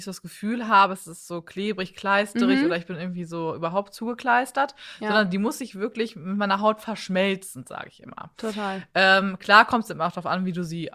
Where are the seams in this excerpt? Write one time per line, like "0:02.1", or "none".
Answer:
none